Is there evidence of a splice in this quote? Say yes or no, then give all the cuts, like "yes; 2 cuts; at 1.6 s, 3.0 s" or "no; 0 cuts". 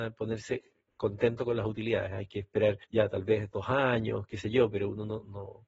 yes; 1 cut; at 2.8 s